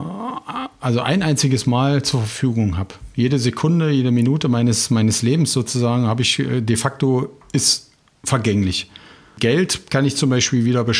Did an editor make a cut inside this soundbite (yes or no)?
no